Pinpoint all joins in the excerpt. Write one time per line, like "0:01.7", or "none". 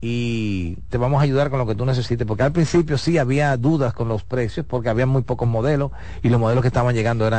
0:00.9